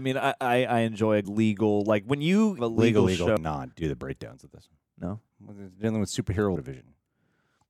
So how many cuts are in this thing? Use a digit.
6